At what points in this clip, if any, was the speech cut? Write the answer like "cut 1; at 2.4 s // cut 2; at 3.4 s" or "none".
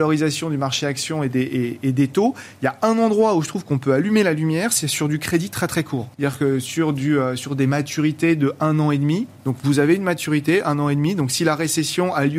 cut 1; at 6.1 s